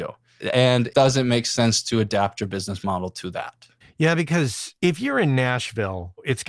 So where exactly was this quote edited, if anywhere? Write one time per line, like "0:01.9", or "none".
0:03.8
0:04.8